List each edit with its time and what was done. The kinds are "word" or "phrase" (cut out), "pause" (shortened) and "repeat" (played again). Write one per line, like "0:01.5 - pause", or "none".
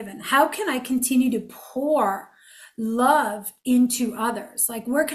none